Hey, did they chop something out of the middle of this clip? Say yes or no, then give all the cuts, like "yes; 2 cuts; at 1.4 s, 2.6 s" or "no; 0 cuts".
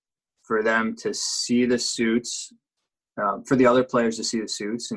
no; 0 cuts